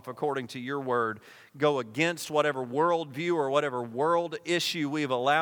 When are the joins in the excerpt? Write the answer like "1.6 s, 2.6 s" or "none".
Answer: none